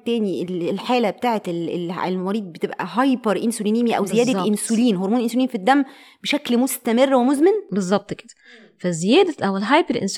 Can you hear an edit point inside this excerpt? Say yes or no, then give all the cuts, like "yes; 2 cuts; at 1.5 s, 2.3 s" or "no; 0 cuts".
no; 0 cuts